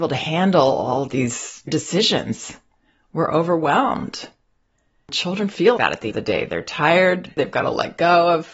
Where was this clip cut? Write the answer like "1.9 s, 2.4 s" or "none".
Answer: 1.7 s, 5.8 s, 6.1 s